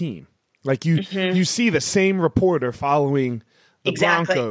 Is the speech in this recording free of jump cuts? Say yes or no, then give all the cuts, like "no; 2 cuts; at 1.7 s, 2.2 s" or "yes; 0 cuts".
yes; 0 cuts